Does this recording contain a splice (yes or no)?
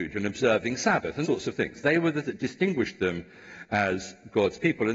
yes